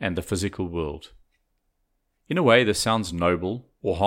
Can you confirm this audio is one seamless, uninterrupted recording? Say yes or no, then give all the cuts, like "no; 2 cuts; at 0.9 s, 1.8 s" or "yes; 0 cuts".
yes; 0 cuts